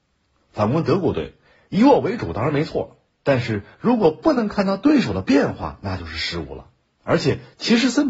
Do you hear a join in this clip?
no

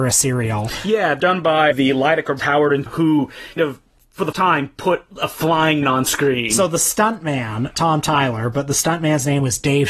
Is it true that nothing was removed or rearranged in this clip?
no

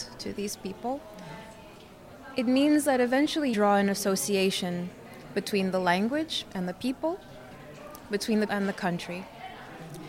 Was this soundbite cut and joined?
yes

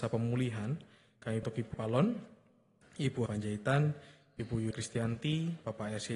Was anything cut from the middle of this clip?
yes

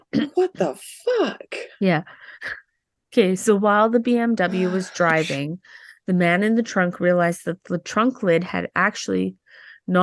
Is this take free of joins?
yes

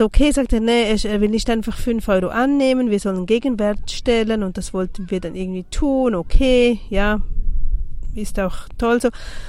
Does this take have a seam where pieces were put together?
no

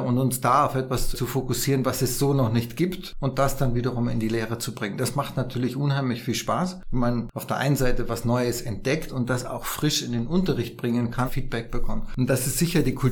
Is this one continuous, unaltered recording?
no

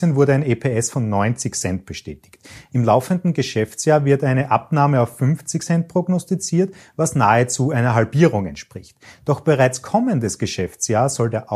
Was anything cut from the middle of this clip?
no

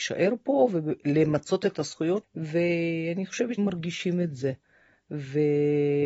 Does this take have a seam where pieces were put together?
yes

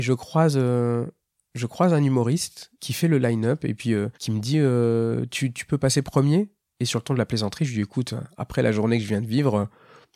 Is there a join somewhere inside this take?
yes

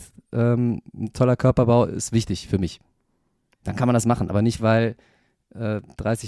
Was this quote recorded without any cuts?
yes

